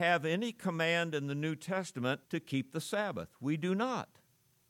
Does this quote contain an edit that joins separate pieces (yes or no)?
yes